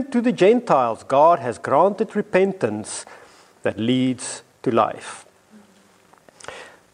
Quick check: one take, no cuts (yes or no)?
yes